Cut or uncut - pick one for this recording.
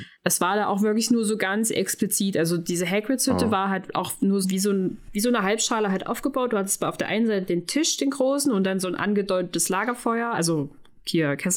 cut